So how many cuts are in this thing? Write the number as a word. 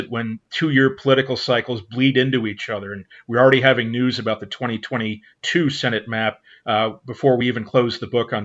zero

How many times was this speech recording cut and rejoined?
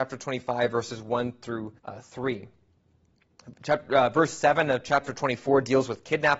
one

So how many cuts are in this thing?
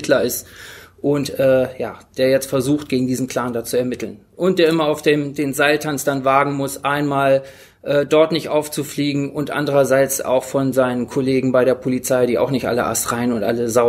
zero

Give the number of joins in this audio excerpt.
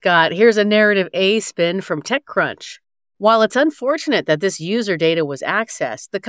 zero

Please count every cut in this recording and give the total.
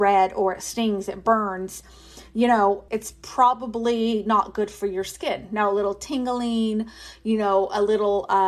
one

